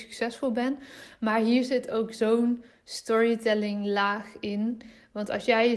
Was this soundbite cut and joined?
no; 0 cuts

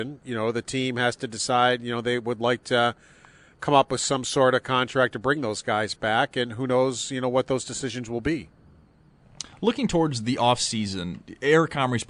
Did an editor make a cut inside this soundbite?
no; 0 cuts

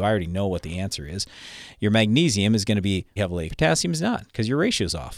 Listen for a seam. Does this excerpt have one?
yes; 2 cuts; at 3.2 s, 3.5 s

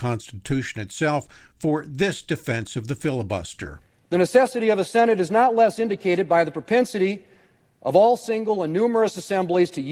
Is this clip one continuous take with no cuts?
yes; 0 cuts

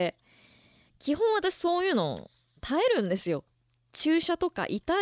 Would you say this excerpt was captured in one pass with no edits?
yes; 0 cuts

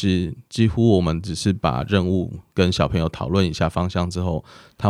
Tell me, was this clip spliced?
yes; 1 cut; at 2.5 s

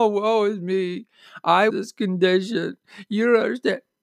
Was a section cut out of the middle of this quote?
yes; 1 cut; at 1.7 s

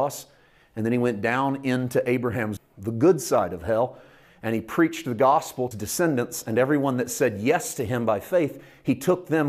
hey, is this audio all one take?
no; 2 cuts; at 2.6 s, 5.7 s

